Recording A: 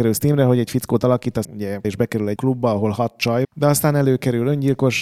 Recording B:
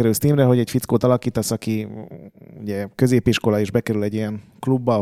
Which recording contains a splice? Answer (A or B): A